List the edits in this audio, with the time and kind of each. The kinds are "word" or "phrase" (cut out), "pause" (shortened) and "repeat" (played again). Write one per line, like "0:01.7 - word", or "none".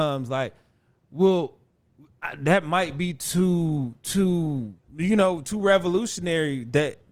0:04.8 - pause

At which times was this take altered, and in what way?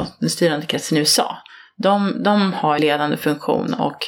0:02.8 - phrase

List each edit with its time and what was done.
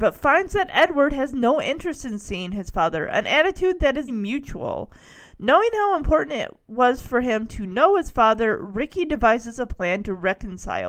0:04.1 - word

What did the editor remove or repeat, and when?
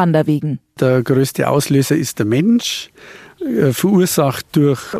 none

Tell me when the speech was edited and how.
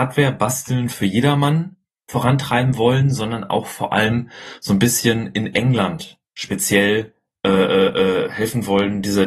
none

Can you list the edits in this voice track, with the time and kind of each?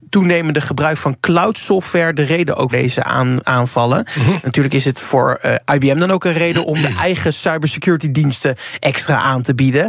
0:02.7 - word

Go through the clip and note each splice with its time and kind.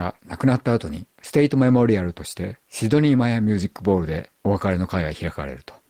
0:01.1 - pause
0:02.6 - pause
0:04.3 - pause

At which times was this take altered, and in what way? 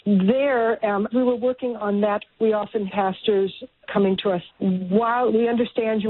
0:01.1 - word
0:02.3 - word
0:02.9 - word
0:03.9 - word
0:04.5 - word

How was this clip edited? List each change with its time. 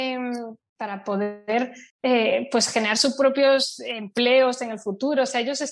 0:01.9 - pause

